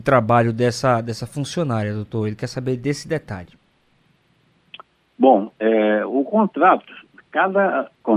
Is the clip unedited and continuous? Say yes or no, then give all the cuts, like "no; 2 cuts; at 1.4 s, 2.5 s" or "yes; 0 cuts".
yes; 0 cuts